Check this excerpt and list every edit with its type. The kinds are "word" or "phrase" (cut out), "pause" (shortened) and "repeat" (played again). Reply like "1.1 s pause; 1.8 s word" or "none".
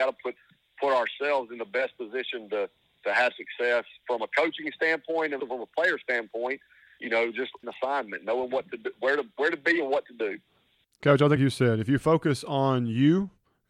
5.4 s word; 7.6 s word; 11.4 s word